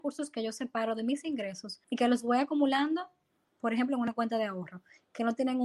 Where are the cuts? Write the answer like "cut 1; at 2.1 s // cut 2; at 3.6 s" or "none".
cut 1; at 1.8 s